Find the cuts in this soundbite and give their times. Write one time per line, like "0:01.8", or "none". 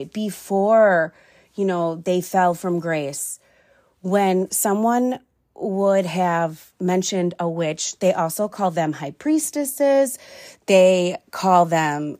none